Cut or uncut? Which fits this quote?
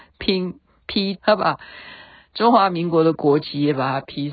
cut